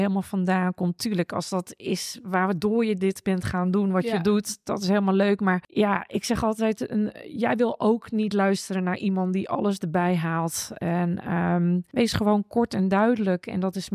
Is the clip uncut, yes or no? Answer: yes